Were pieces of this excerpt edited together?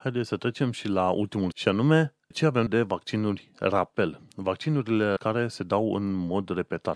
yes; 4 cuts; at 1.5 s, 2.3 s, 2.7 s, 5.2 s

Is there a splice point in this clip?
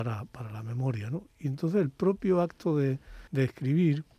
yes; 1 cut; at 3.3 s

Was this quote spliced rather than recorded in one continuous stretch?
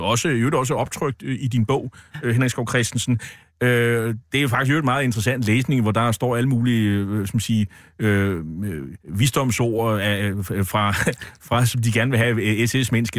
yes; 1 cut; at 9.0 s

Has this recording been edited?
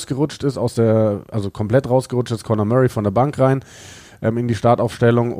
no; 0 cuts

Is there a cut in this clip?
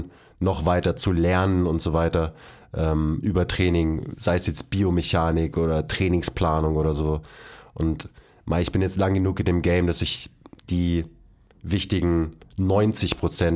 no; 0 cuts

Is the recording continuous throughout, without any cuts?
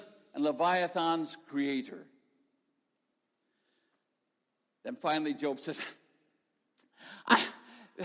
yes; 0 cuts

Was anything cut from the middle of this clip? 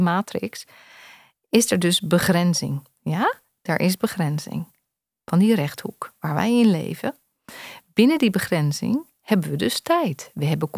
no; 0 cuts

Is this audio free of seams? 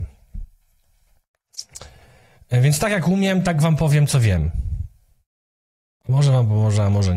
yes; 0 cuts

